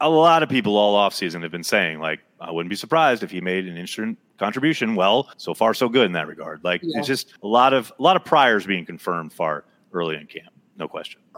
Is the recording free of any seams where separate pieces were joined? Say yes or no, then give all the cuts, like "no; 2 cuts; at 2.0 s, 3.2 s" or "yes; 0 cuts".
no; 3 cuts; at 5.3 s, 7.4 s, 9.3 s